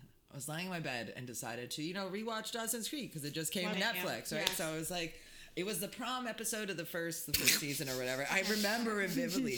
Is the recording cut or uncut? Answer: cut